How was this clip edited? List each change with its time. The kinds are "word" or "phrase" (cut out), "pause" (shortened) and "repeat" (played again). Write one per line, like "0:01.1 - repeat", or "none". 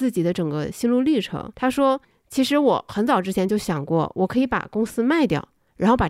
0:01.5 - pause
0:02.0 - pause